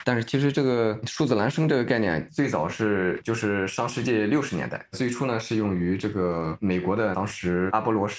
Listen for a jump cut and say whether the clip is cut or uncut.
cut